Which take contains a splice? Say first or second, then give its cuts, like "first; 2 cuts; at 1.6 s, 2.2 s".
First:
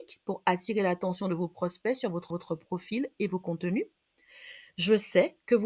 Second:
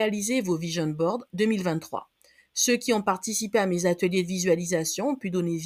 first; 1 cut; at 2.3 s